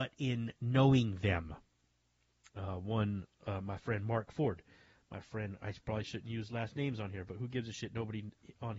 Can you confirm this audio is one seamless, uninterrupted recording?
yes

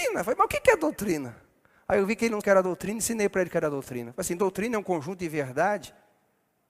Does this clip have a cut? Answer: yes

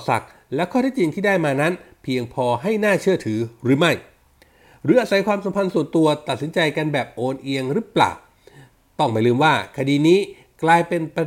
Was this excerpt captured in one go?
yes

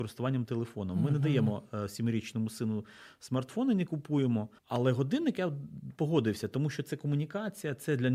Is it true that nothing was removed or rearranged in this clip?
no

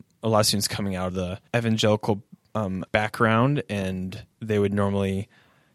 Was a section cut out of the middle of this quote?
yes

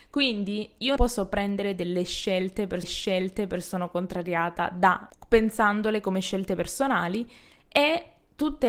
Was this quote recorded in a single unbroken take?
no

